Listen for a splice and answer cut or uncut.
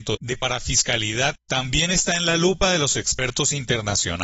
uncut